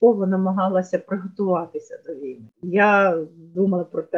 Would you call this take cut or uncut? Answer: uncut